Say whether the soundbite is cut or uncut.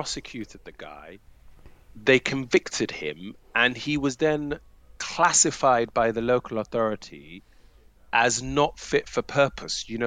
uncut